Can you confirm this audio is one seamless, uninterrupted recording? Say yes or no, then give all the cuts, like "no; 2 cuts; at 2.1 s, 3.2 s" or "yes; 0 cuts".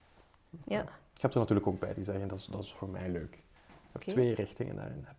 yes; 0 cuts